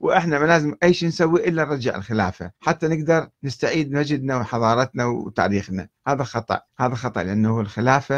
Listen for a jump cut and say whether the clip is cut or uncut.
cut